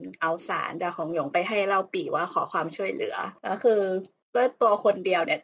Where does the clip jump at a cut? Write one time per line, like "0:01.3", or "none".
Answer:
none